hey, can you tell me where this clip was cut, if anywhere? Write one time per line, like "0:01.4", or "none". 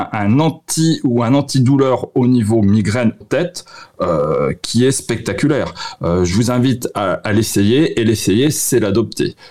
0:03.2